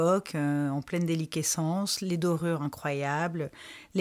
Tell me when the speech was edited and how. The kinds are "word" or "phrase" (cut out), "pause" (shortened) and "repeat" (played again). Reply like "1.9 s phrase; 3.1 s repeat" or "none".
none